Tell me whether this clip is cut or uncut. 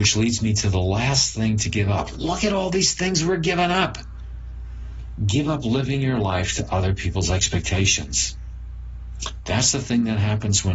uncut